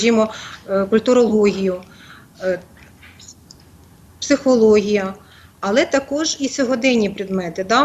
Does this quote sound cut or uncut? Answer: uncut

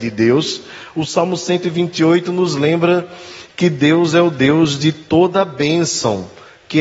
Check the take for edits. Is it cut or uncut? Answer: uncut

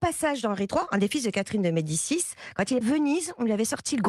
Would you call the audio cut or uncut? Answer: cut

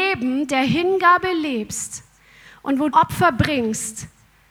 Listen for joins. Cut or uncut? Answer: cut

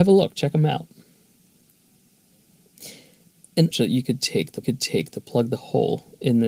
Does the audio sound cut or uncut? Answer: cut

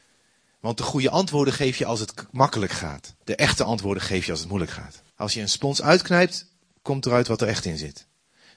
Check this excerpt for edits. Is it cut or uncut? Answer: cut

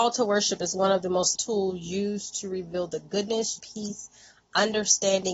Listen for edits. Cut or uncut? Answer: cut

